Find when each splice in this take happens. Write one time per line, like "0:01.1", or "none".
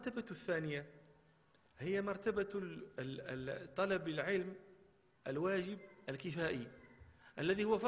none